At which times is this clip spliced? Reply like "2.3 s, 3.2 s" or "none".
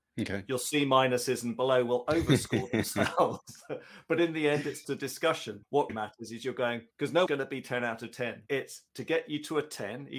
4.8 s, 5.9 s, 6.9 s, 7.3 s, 8.9 s